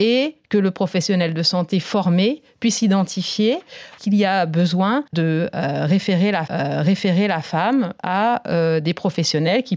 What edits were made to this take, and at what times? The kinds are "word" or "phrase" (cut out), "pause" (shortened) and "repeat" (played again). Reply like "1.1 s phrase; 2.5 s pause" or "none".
5.1 s pause; 6.5 s repeat